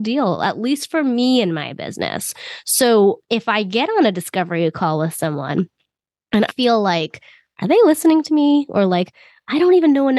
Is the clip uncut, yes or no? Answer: no